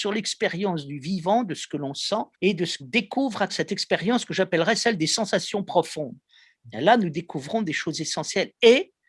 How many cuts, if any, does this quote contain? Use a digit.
3